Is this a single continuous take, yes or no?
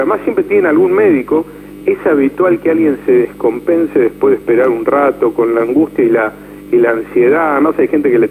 yes